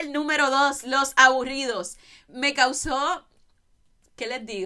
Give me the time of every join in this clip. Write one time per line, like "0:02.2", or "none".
0:02.3